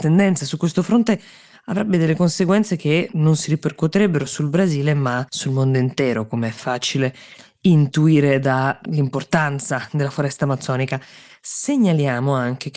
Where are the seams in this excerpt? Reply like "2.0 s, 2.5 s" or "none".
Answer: 4.3 s, 5.3 s